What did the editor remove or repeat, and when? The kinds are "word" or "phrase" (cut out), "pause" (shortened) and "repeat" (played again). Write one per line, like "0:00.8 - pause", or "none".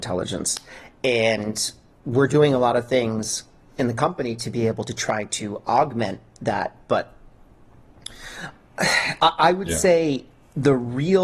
none